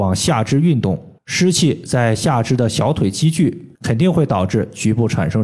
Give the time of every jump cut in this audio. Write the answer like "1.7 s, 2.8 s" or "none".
1.2 s, 3.7 s